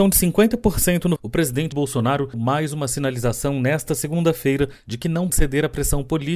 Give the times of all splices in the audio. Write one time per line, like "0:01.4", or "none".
0:01.2
0:01.7
0:02.3
0:05.3